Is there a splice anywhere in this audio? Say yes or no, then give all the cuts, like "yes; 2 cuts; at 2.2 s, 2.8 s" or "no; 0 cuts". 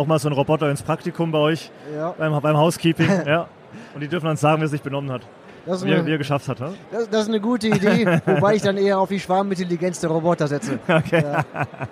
no; 0 cuts